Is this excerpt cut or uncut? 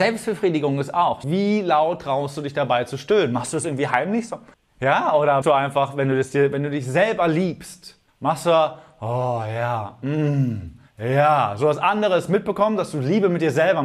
cut